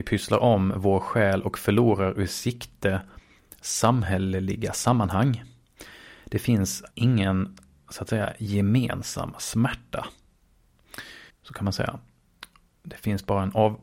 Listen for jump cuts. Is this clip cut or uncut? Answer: cut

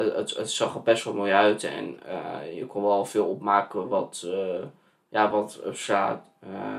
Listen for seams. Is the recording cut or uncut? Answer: uncut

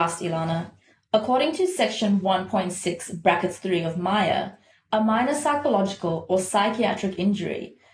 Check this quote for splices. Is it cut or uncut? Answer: uncut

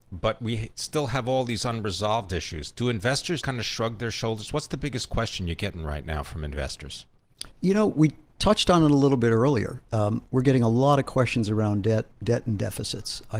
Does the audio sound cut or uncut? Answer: cut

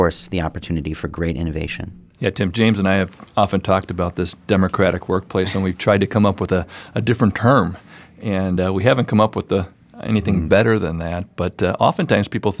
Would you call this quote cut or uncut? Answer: uncut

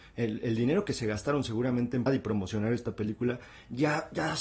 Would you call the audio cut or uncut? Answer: cut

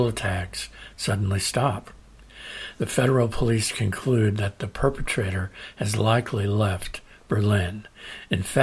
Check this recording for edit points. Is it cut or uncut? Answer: uncut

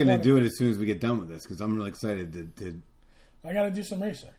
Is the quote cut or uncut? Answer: uncut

